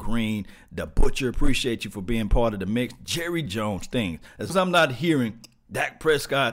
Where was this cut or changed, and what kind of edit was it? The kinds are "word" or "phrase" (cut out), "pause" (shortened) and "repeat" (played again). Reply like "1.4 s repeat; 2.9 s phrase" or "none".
3.5 s phrase; 4.5 s word

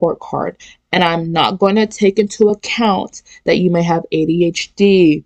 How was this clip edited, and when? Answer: none

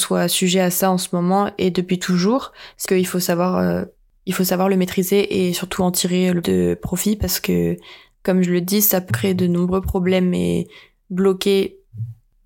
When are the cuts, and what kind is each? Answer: 2.9 s word; 6.4 s word; 9.1 s word

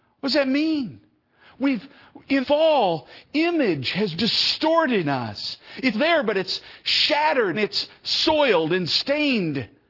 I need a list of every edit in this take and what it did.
2.4 s word; 3.2 s word; 4.2 s word; 5.0 s word; 5.9 s word; 7.5 s word

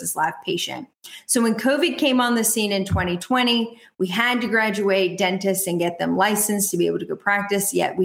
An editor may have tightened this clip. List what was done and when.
none

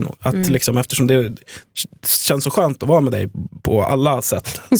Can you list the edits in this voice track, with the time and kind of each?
none

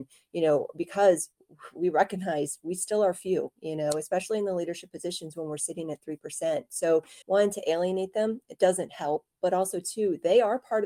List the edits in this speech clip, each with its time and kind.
7.2 s pause

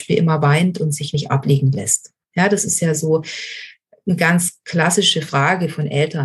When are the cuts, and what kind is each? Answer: none

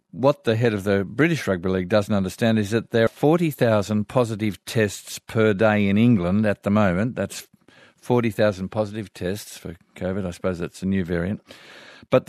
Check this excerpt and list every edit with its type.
3.1 s word

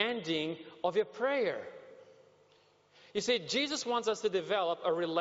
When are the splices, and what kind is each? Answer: none

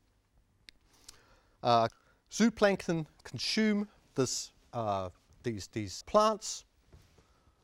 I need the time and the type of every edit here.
6.0 s word

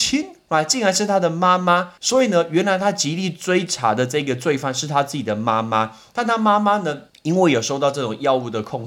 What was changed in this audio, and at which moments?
2.0 s pause; 7.1 s pause

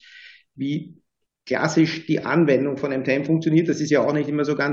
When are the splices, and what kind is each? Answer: none

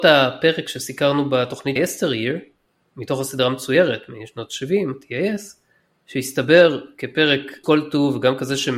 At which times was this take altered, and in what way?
1.8 s word; 7.6 s word

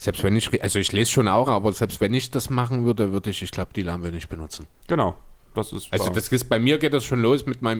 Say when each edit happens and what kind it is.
1.5 s phrase

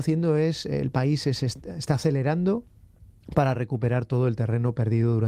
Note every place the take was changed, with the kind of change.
none

